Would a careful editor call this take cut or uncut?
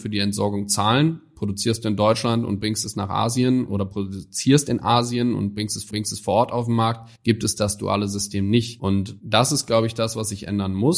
cut